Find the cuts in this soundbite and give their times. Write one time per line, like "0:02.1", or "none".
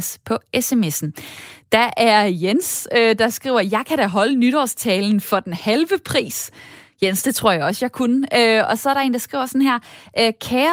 none

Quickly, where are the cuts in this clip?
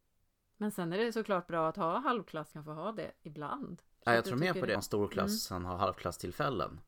0:02.5
0:03.9
0:04.8

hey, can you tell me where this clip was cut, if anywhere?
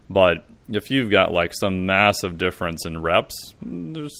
none

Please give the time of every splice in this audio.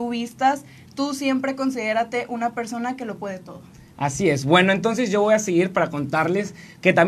none

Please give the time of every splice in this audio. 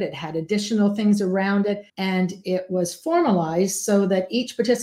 0:01.9

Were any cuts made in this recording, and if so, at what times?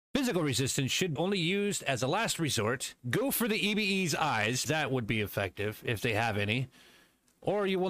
0:01.2
0:03.0
0:04.7

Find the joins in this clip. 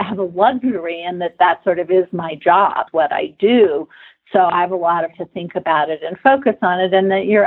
0:02.9
0:05.1

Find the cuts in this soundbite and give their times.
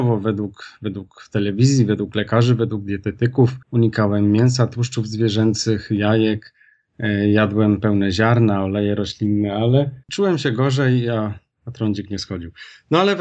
0:03.6
0:10.0

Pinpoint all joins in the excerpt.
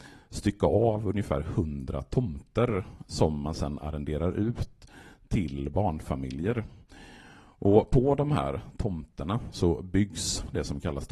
none

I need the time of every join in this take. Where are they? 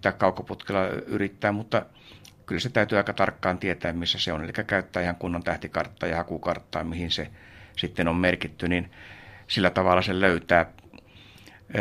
none

